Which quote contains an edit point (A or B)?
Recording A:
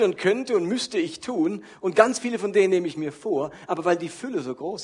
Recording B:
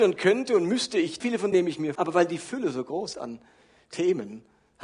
B